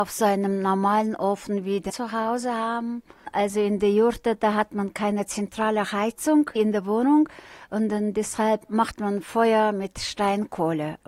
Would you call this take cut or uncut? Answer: cut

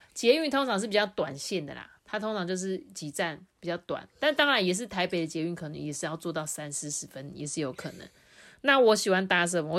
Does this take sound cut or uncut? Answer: cut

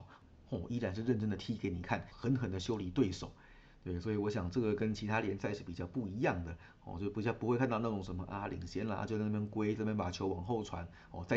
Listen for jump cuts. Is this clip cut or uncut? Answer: cut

